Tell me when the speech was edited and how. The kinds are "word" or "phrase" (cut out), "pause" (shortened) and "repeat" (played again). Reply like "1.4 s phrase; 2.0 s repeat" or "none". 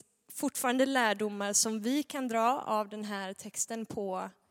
none